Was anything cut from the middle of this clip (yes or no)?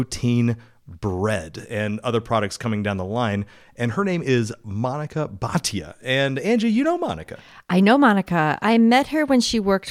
no